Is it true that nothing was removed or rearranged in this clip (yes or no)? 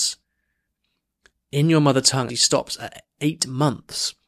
no